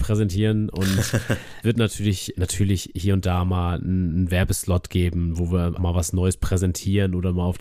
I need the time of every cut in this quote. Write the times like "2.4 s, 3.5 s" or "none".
1.6 s, 2.3 s, 5.8 s

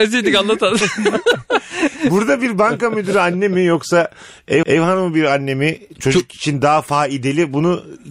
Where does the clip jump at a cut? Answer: 4.6 s

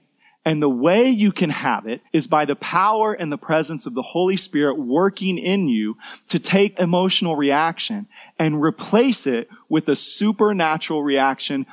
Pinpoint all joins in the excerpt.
2.1 s, 6.7 s

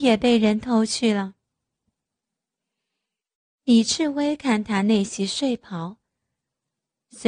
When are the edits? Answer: none

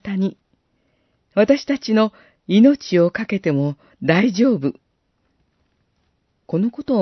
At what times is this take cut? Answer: none

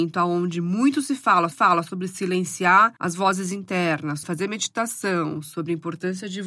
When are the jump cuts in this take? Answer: 1.5 s, 3.0 s, 4.2 s

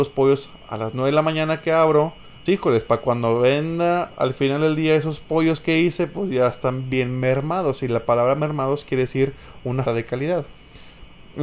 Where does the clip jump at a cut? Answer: 2.5 s, 9.9 s

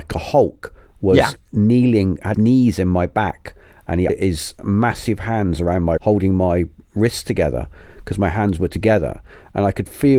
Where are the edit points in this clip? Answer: 2.3 s, 4.1 s, 6.0 s

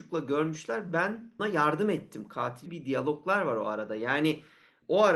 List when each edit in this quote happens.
1.4 s, 2.7 s

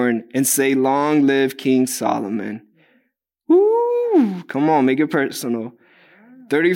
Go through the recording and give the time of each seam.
none

